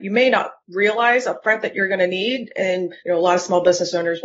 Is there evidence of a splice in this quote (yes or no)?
yes